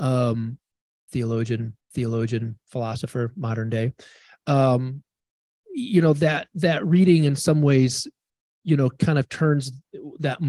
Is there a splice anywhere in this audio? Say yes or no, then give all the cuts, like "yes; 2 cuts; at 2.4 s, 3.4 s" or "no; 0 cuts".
yes; 1 cut; at 1.8 s